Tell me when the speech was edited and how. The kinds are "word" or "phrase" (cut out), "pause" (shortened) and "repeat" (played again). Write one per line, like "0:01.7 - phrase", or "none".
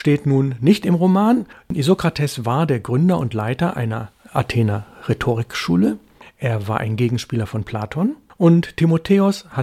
none